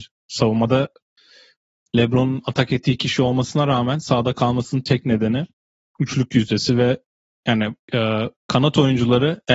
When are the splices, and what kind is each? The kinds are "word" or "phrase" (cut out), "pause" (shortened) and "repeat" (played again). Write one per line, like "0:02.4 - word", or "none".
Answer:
0:07.8 - pause